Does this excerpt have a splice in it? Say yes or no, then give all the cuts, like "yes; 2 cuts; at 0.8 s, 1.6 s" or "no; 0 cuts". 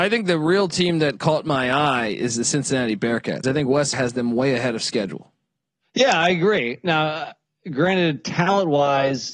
yes; 2 cuts; at 3.4 s, 3.9 s